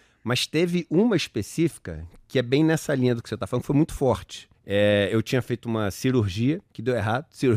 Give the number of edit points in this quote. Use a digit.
1